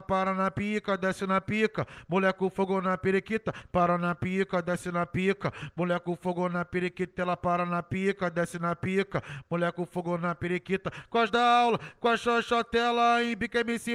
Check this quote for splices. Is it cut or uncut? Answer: cut